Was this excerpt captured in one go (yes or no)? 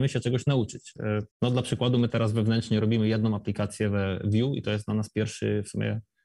no